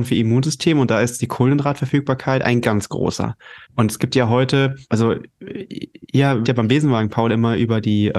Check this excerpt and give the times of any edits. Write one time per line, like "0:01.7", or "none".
0:02.6
0:03.6
0:04.8
0:06.4